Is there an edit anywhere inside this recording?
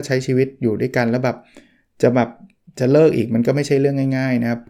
no; 0 cuts

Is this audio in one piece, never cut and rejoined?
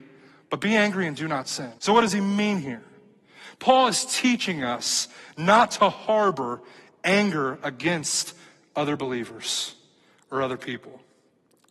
no; 1 cut; at 1.8 s

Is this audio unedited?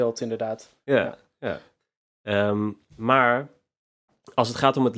yes; 0 cuts

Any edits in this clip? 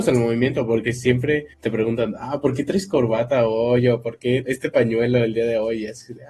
yes; 2 cuts; at 1.5 s, 4.4 s

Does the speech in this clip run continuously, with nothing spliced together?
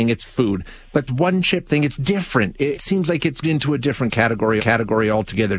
no; 4 cuts; at 1.1 s, 2.8 s, 3.4 s, 4.6 s

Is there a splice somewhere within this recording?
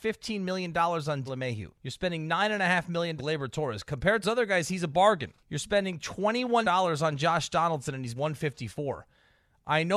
yes; 7 cuts; at 1.3 s, 1.7 s, 3.2 s, 4.2 s, 5.4 s, 6.6 s, 8.2 s

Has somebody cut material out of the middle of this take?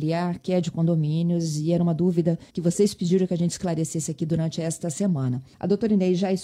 yes; 2 cuts; at 2.5 s, 5.5 s

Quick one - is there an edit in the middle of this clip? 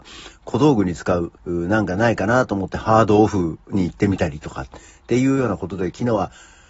yes; 1 cut; at 1.4 s

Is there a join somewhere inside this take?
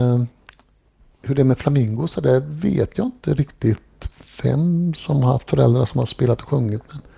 no; 0 cuts

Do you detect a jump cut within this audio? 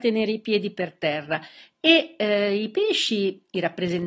no; 0 cuts

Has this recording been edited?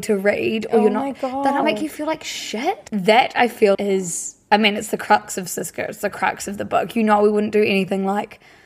yes; 2 cuts; at 1.6 s, 3.7 s

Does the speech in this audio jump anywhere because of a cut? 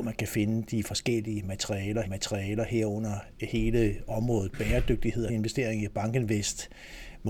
yes; 2 cuts; at 2.0 s, 5.3 s

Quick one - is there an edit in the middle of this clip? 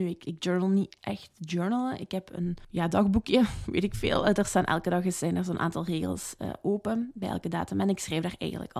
yes; 1 cut; at 1.0 s

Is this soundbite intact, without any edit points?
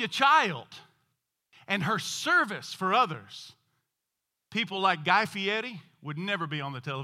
yes; 0 cuts

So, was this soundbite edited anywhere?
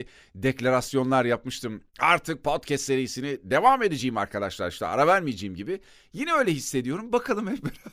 no; 0 cuts

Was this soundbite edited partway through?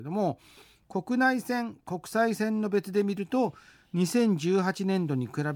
no; 0 cuts

